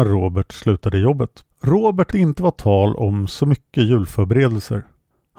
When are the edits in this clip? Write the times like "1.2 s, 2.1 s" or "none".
1.5 s, 2.1 s